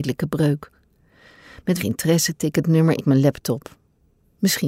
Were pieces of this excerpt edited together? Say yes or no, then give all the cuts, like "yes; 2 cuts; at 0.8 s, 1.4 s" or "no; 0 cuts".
yes; 3 cuts; at 1.8 s, 2.4 s, 3.0 s